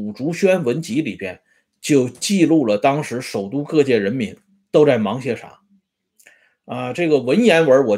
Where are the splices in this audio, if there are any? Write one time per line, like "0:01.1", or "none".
none